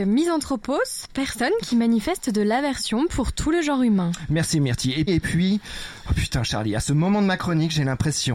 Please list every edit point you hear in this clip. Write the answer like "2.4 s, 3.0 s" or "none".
5.1 s